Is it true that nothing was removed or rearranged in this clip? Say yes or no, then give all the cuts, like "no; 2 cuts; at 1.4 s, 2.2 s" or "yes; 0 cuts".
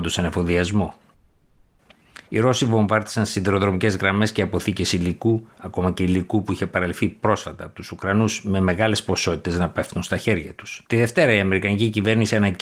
no; 3 cuts; at 2.2 s, 5.5 s, 10.8 s